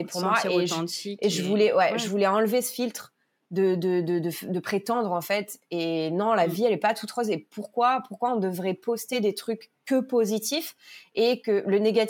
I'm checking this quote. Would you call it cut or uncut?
uncut